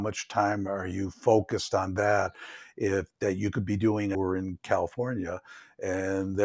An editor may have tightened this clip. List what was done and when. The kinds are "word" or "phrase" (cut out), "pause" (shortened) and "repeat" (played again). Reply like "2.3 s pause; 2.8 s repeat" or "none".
4.1 s phrase